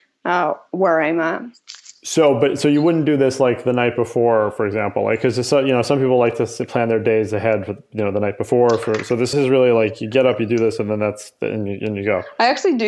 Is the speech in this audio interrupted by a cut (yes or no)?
yes